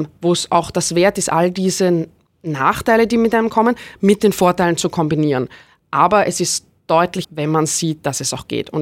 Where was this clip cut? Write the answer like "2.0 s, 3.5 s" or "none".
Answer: 7.2 s